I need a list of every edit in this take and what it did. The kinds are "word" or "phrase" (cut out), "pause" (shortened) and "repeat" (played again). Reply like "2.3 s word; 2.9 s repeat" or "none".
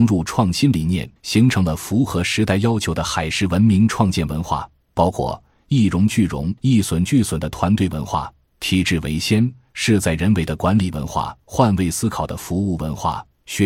1.2 s pause; 6.6 s pause; 11.4 s phrase